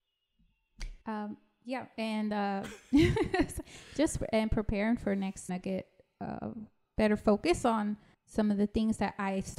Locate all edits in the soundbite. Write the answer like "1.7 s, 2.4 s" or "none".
1.0 s, 5.5 s, 8.1 s